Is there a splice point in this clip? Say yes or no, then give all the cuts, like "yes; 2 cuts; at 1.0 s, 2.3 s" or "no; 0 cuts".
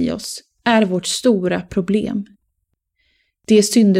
no; 0 cuts